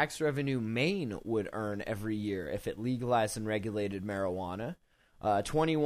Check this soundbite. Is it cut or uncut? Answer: uncut